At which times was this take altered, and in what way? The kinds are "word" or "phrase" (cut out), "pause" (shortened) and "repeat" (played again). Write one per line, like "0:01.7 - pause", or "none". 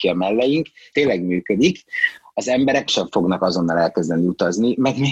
0:00.9 - word
0:02.9 - word

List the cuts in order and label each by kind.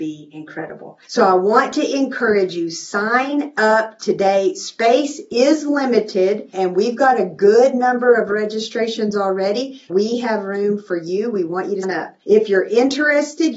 0:01.0 - pause
0:06.5 - word
0:09.9 - word
0:11.8 - word
0:12.2 - pause

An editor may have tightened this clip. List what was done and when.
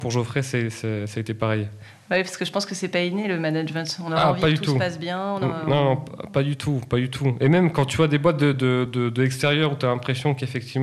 none

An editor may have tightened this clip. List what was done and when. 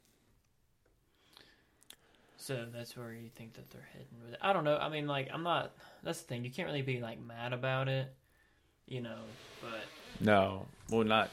none

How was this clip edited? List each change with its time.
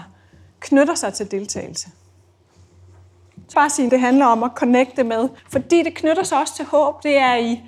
0:03.5 - phrase
0:03.9 - word
0:05.4 - pause

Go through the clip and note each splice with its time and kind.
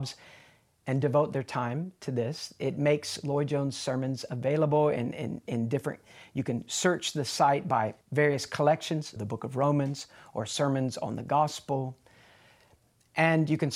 0:08.0 - pause
0:09.2 - word

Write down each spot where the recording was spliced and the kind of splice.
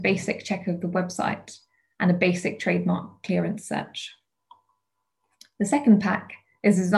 none

